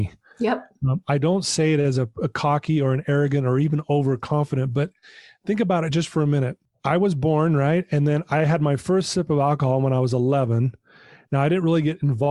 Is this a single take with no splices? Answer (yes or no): yes